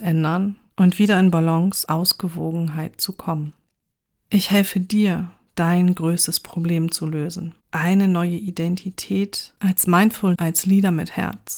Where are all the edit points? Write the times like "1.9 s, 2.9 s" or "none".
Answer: 1.9 s, 7.6 s, 9.6 s, 10.3 s